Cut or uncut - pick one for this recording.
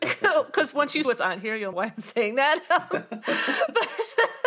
cut